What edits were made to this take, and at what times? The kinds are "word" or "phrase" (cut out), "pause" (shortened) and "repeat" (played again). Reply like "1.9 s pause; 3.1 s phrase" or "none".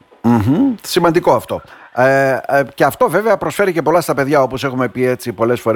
none